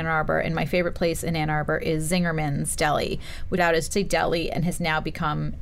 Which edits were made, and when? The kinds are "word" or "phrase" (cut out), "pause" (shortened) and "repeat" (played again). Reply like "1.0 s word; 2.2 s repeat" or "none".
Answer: 3.6 s word; 3.9 s word